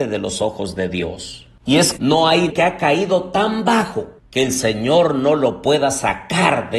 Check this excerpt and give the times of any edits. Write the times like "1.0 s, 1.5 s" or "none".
2.0 s, 2.5 s, 4.2 s

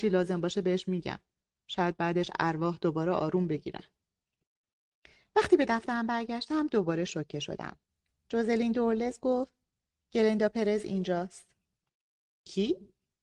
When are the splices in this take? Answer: none

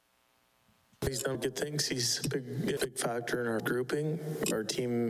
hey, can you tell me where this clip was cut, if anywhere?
1.3 s, 2.8 s, 3.6 s

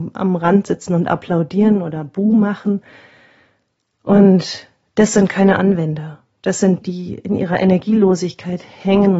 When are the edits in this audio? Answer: 6.8 s

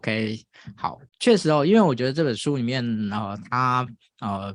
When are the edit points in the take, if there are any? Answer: 1.1 s

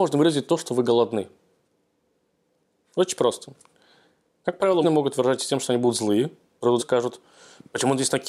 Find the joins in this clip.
4.8 s, 6.8 s

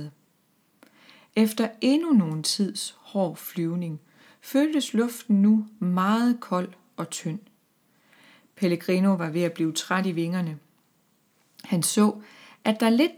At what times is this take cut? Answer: none

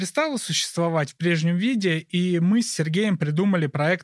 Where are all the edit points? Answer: none

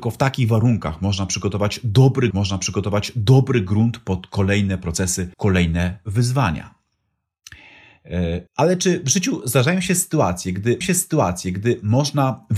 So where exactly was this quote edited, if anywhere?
2.3 s, 5.3 s, 8.5 s, 10.8 s

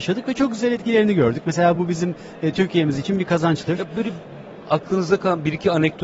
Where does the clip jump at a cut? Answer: none

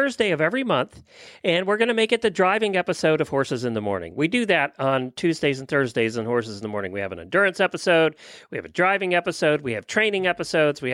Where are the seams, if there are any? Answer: none

